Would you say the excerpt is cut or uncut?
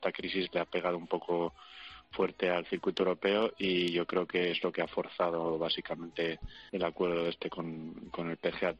cut